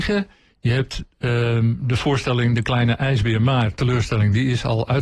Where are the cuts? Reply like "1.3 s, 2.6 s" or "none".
none